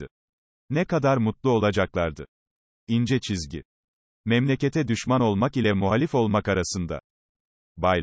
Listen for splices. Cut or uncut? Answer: uncut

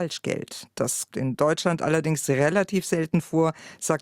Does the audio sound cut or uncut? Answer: cut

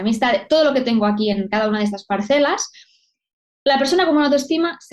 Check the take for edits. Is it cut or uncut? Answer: uncut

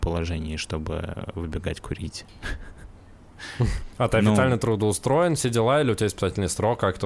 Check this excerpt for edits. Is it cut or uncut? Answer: uncut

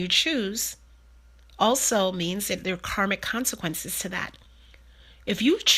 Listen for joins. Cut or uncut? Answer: uncut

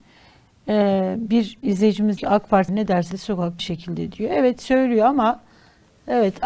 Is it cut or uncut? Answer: cut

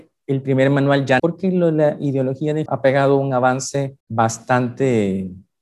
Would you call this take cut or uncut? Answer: cut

